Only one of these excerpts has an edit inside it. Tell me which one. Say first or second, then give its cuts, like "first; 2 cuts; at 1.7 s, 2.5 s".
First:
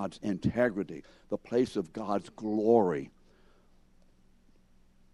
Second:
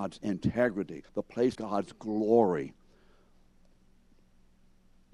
second; 2 cuts; at 1.1 s, 1.5 s